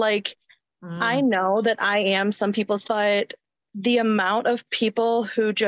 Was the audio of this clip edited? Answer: yes; 2 cuts; at 2.8 s, 3.6 s

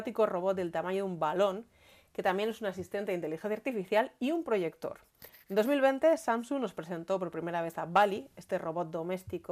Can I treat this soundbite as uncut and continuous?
yes; 0 cuts

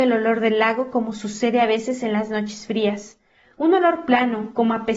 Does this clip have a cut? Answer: no; 0 cuts

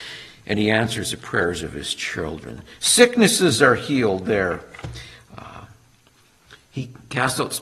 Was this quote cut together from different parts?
no; 0 cuts

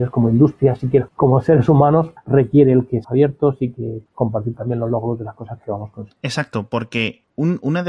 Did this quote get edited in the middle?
yes; 3 cuts; at 1.1 s, 3.0 s, 4.1 s

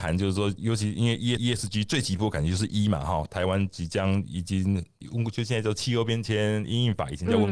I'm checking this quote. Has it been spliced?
yes; 1 cut; at 1.4 s

